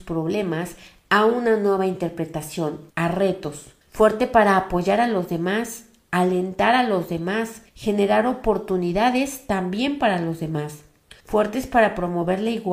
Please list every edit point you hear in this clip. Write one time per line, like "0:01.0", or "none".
0:02.9
0:03.8
0:07.7
0:11.2

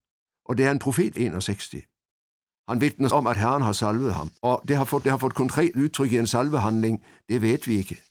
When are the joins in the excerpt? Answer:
0:01.2
0:03.1
0:04.4
0:05.0

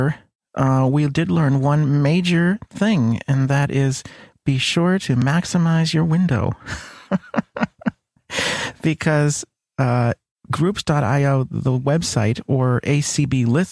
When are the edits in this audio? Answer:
none

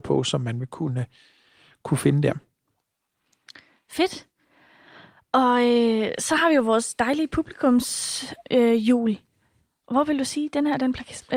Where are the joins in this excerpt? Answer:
none

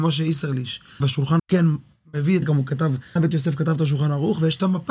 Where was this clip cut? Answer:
0:01.0
0:01.4
0:02.4
0:03.2

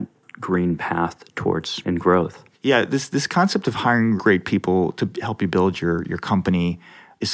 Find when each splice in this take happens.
0:01.8
0:02.5
0:04.2
0:05.1

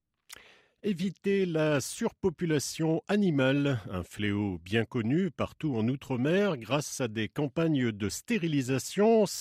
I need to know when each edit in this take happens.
none

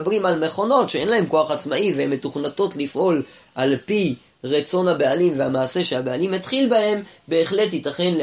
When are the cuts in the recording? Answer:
none

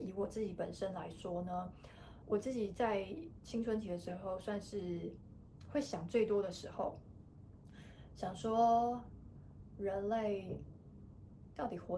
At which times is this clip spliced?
0:02.2

